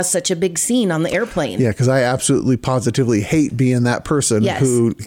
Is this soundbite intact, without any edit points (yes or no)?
yes